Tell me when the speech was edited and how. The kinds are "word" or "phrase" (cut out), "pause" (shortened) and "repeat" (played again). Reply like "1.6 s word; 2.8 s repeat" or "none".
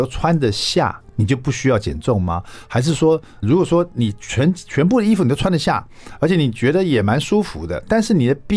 3.4 s word

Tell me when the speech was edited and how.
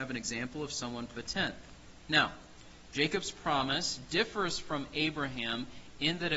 1.1 s phrase

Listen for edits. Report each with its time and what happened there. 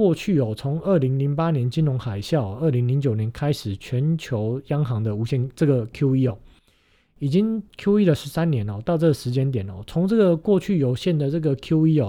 none

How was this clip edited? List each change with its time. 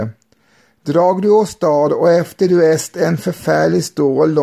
none

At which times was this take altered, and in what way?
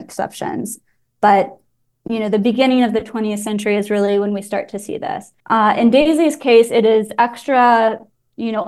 5.4 s pause

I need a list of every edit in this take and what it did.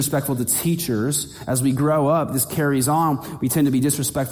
none

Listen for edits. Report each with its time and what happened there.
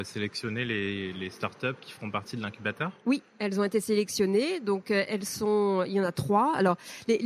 none

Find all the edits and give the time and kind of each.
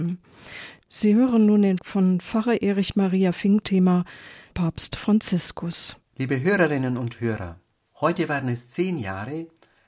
1.8 s word; 3.6 s word; 4.5 s phrase; 6.0 s pause

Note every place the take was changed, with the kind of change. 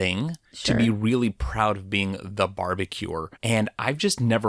3.4 s pause

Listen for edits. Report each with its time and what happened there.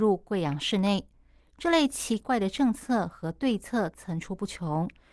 none

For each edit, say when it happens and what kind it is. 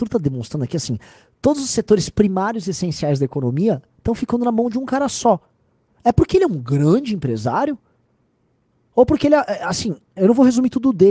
none

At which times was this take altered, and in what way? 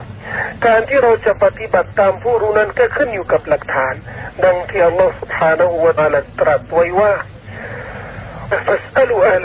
6.0 s word; 8.5 s word

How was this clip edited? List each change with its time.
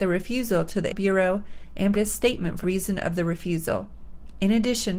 0.9 s word; 1.9 s word; 2.6 s word

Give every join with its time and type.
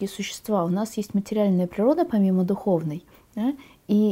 3.1 s pause

